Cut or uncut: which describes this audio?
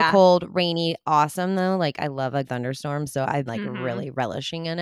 cut